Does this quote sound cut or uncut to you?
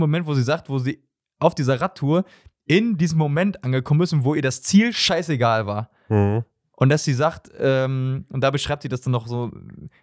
uncut